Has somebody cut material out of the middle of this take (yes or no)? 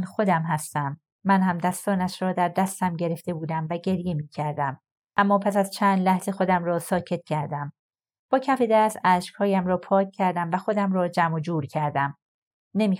no